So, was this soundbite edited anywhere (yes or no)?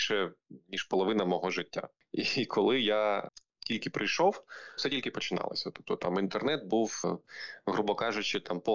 yes